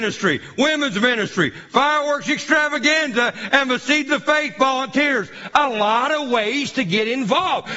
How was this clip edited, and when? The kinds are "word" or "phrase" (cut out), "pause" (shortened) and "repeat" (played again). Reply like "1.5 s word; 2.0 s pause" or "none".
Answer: none